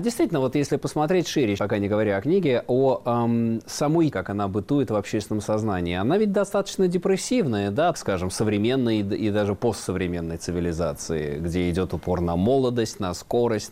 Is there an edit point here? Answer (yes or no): yes